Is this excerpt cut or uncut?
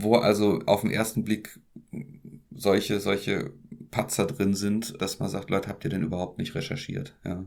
uncut